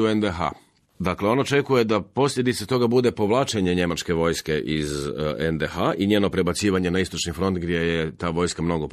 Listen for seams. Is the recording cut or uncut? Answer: uncut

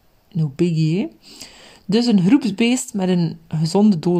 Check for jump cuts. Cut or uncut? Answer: uncut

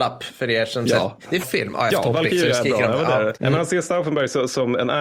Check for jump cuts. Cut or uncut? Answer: cut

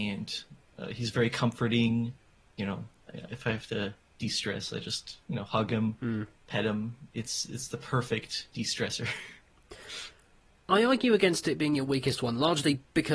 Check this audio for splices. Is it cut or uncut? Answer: uncut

